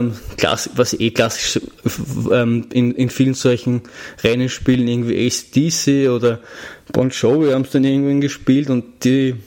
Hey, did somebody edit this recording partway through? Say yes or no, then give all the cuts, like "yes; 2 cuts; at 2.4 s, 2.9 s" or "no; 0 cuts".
no; 0 cuts